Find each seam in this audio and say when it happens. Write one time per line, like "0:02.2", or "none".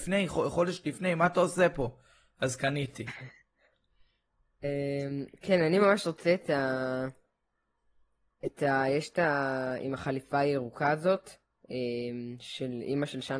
none